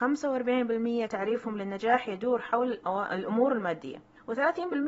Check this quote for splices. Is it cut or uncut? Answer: cut